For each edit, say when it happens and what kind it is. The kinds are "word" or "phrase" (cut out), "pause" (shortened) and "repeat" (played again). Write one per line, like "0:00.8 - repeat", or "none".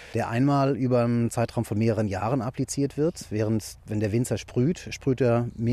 none